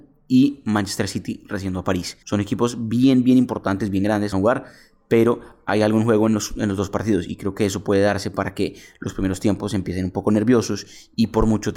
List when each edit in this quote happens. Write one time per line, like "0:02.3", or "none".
0:02.2
0:04.3